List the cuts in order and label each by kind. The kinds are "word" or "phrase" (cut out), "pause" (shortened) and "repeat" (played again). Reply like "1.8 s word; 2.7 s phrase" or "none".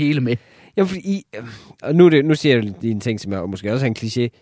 none

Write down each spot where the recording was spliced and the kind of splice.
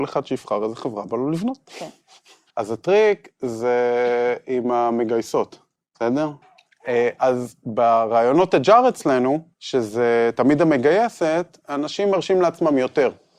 2.5 s pause; 5.8 s pause; 9.5 s pause

